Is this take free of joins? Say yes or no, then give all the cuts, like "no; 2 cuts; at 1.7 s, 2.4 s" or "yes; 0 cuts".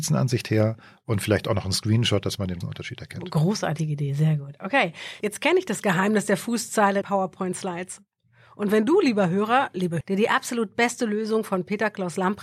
no; 3 cuts; at 2.6 s, 7.0 s, 10.0 s